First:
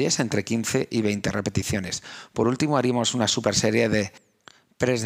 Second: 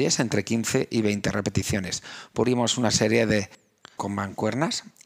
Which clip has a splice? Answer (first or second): second